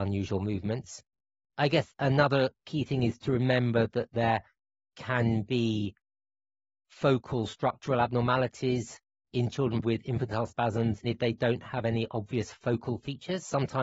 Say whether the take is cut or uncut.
cut